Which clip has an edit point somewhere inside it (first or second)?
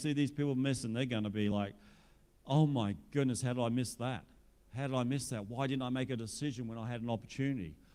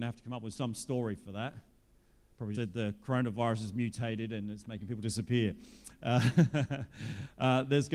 second